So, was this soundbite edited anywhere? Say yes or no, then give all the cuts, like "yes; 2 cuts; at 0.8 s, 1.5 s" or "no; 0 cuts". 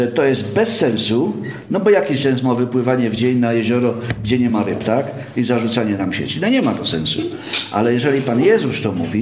no; 0 cuts